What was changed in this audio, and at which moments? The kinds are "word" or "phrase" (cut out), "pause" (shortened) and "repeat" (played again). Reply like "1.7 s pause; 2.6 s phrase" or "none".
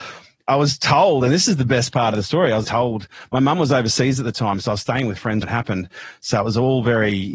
2.6 s word; 5.4 s word